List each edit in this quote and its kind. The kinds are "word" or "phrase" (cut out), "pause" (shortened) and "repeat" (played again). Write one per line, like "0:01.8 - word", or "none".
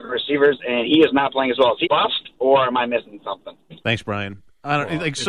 0:01.8 - word
0:03.8 - pause